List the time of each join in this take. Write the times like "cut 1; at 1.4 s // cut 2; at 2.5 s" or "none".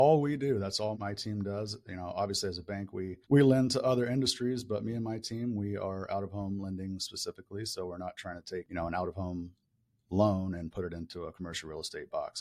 cut 1; at 0.9 s // cut 2; at 3.2 s